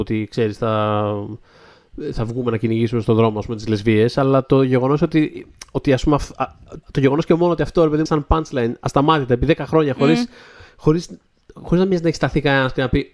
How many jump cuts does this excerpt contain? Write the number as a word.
two